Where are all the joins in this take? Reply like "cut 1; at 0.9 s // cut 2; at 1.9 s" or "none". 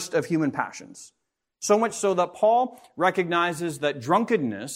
none